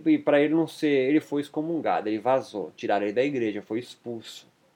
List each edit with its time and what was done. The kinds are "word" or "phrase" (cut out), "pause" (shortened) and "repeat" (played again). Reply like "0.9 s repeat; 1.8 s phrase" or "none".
none